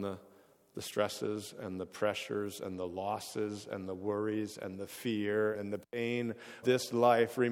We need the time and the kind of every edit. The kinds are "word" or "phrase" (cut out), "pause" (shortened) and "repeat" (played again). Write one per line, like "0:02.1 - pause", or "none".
0:05.5 - word
0:06.6 - word